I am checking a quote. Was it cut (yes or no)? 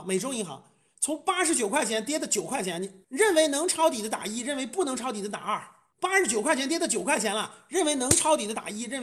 no